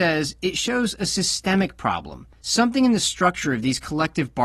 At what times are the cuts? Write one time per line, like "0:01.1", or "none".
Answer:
0:02.3